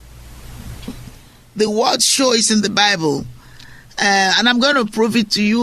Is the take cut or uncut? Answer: uncut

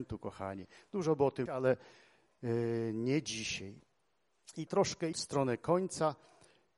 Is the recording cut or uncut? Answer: cut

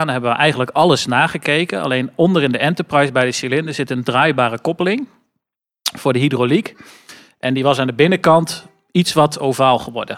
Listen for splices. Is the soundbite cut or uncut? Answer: uncut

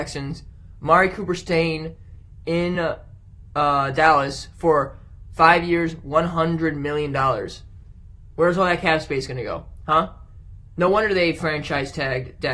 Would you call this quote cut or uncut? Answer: uncut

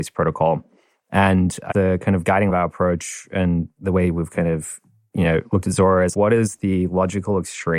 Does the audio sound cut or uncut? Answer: cut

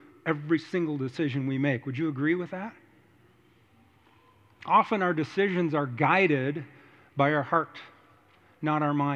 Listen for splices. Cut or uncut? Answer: uncut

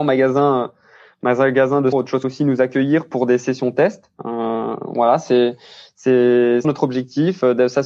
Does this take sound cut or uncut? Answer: cut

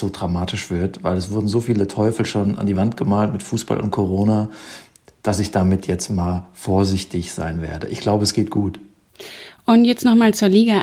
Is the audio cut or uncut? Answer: uncut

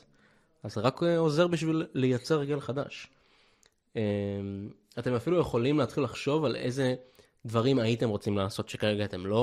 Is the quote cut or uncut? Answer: uncut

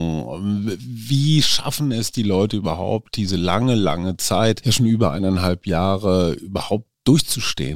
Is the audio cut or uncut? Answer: uncut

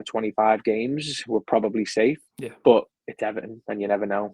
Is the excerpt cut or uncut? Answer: cut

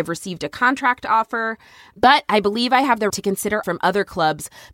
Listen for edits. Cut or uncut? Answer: cut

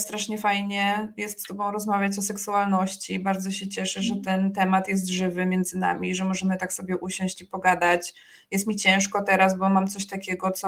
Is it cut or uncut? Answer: uncut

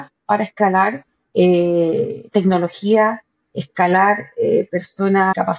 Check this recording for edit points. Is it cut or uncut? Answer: uncut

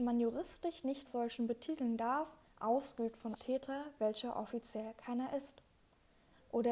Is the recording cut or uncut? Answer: cut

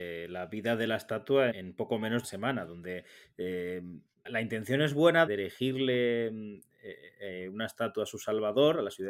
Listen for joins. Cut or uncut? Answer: cut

